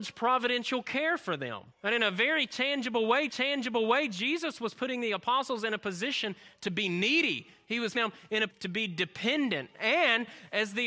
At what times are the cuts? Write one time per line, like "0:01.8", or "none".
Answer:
0:01.7
0:03.3
0:07.9
0:08.5